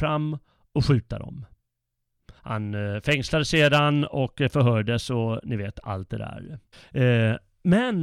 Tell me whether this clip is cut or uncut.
cut